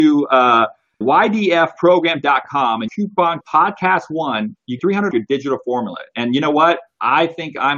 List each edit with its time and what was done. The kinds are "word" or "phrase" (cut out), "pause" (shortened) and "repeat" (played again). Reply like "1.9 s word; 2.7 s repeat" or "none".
1.0 s word; 2.9 s word; 3.4 s word; 4.8 s word; 5.1 s word